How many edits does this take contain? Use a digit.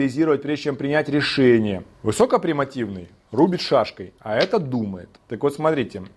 2